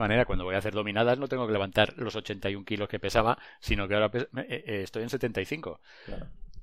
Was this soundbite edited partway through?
no; 0 cuts

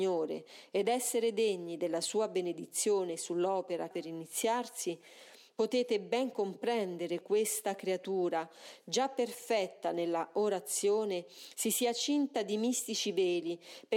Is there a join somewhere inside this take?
yes; 2 cuts; at 3.9 s, 7.2 s

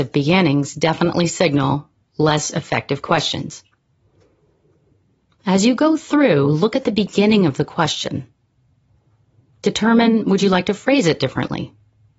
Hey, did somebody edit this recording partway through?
no; 0 cuts

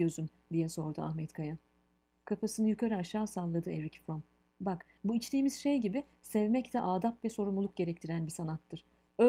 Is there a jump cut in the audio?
no; 0 cuts

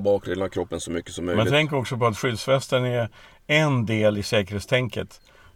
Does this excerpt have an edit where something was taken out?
no; 0 cuts

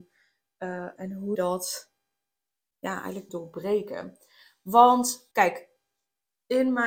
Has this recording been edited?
yes; 4 cuts; at 1.0 s, 1.3 s, 3.3 s, 5.3 s

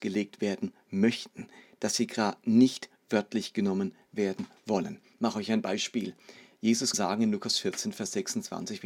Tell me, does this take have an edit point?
yes; 1 cut; at 6.9 s

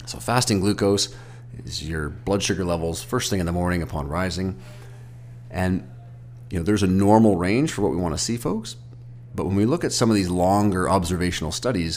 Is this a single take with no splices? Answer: yes; 0 cuts

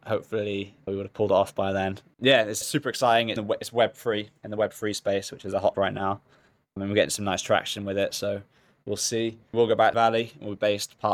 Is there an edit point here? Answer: yes; 5 cuts; at 2.6 s, 3.4 s, 5.7 s, 9.5 s, 9.9 s

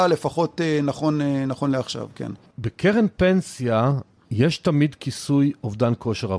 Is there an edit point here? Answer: no; 0 cuts

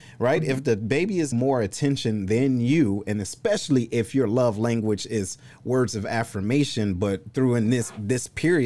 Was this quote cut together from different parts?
yes; 1 cut; at 1.3 s

